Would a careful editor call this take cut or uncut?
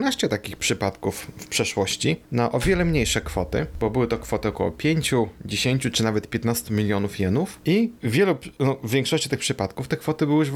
uncut